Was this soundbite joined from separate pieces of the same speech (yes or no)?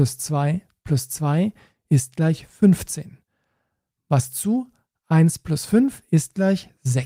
no